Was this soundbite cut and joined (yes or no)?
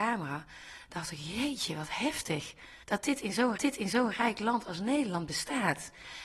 yes